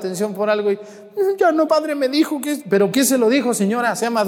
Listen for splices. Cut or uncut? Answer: cut